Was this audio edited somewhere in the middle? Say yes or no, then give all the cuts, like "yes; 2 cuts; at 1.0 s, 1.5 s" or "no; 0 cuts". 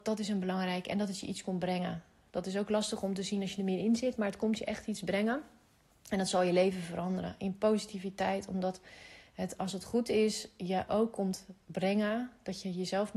no; 0 cuts